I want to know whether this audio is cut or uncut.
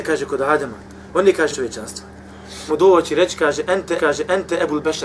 cut